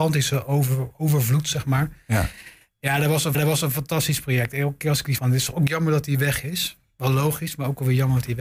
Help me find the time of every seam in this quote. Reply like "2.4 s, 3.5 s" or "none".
3.3 s, 5.2 s